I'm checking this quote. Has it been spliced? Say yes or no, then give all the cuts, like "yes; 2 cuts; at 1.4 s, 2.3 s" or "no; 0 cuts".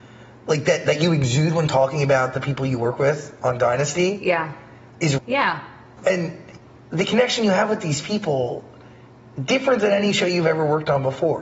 yes; 1 cut; at 5.2 s